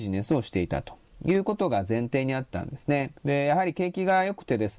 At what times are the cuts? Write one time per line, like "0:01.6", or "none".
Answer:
0:03.2